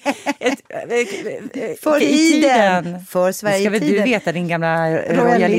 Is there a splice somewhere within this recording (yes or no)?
yes